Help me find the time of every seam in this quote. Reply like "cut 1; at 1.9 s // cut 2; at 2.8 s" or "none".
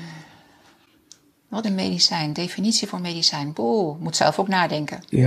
cut 1; at 1.6 s